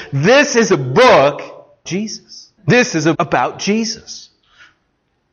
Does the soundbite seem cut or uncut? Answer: cut